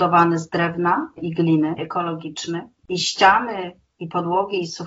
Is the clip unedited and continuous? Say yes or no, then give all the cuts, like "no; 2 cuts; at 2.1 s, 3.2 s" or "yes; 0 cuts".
no; 3 cuts; at 1.2 s, 1.8 s, 2.8 s